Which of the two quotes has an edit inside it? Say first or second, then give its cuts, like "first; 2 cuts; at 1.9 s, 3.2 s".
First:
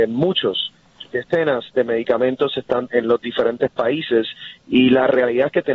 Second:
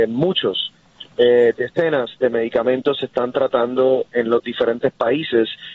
first; 2 cuts; at 1.1 s, 2.9 s